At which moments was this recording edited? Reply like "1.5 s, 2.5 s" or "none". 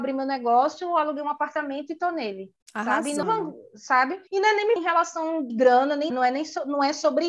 2.6 s, 3.2 s, 4.3 s, 4.8 s, 5.5 s, 6.1 s